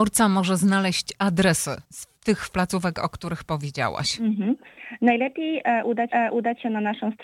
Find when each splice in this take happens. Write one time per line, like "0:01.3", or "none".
0:02.5
0:06.1